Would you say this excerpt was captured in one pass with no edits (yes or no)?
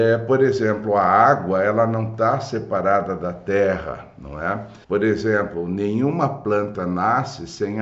no